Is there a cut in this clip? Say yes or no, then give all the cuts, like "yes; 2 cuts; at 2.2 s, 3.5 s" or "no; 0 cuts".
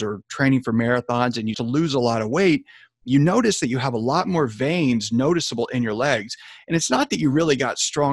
yes; 1 cut; at 1.5 s